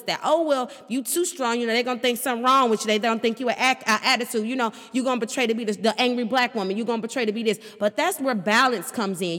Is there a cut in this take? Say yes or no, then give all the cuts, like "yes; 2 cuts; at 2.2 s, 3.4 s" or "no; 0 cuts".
no; 0 cuts